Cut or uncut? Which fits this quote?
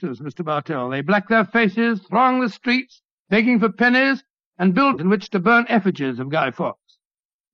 cut